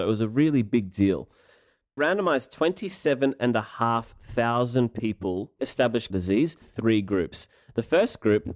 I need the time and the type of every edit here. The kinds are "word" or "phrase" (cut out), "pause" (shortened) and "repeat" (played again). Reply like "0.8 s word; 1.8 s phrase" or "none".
2.0 s word; 5.6 s word; 6.1 s word; 6.6 s word